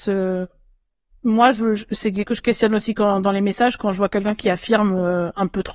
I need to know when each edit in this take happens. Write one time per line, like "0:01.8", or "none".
0:02.2